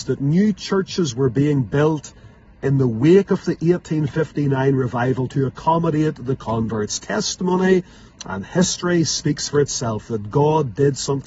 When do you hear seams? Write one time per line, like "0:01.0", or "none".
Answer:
none

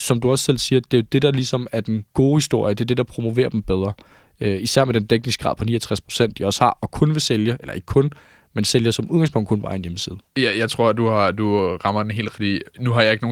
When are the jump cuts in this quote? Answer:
0:02.1
0:10.3
0:12.3

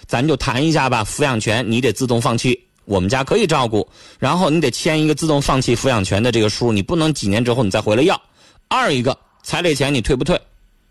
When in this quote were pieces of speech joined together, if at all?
none

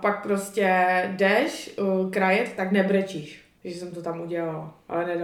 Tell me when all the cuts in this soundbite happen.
none

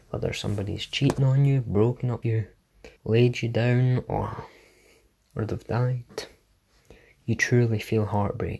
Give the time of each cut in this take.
0:02.2
0:03.0

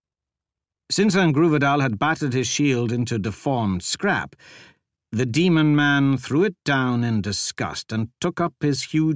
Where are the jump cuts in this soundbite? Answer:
none

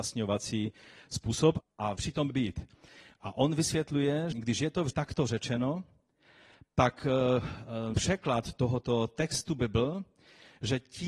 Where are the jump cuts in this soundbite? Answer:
0:01.6
0:02.0
0:02.3
0:04.3
0:04.9
0:07.9

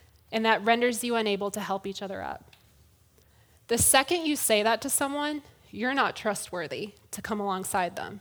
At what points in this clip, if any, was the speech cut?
none

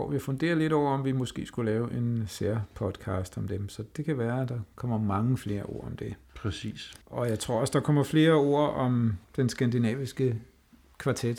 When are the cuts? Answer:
0:07.0
0:09.2

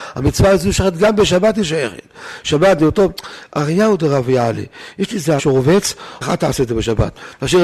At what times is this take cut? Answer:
0:05.4
0:06.2

